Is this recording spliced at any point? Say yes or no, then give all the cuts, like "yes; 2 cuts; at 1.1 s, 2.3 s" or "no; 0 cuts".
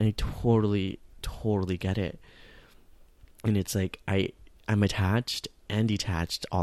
no; 0 cuts